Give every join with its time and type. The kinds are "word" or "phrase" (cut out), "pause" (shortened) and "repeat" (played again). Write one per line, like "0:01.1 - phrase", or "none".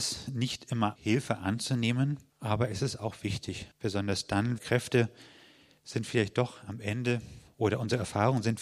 0:01.0 - word
0:02.3 - pause
0:03.7 - pause
0:04.6 - phrase

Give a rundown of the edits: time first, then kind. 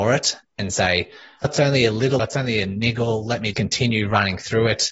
0:01.4 - word
0:02.2 - word
0:03.5 - word

